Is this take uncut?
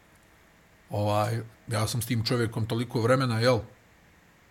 no; 1 cut; at 1.5 s

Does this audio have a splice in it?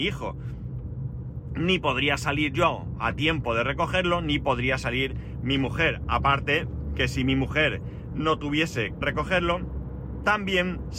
yes; 1 cut; at 9.0 s

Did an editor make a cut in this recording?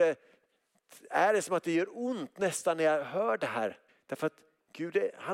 yes; 1 cut; at 3.9 s

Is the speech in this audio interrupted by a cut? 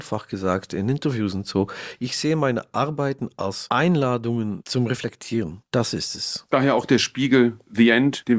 no; 0 cuts

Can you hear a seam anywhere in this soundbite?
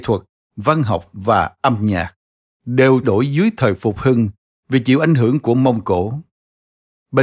yes; 1 cut; at 3.0 s

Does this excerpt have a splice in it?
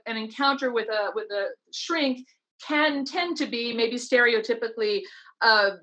no; 0 cuts

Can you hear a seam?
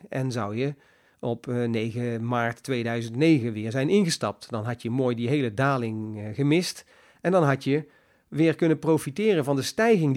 no; 0 cuts

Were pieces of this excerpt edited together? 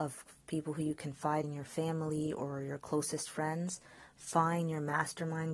yes; 1 cut; at 1.4 s

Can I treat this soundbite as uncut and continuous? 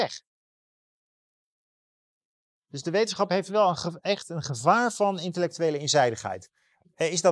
yes; 0 cuts

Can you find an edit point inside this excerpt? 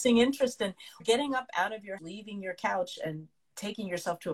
yes; 2 cuts; at 1.0 s, 2.0 s

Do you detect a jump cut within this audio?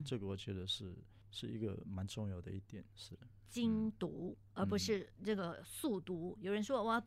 no; 0 cuts

